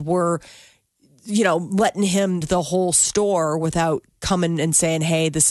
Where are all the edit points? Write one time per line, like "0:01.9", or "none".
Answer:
0:02.4